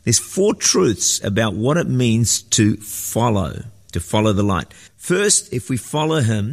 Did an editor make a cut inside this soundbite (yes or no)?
yes